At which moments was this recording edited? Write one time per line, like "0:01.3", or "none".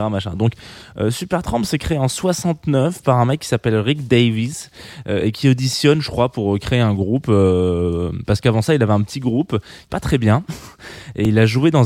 0:09.9